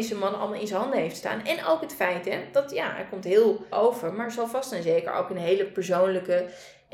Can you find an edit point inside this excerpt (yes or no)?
yes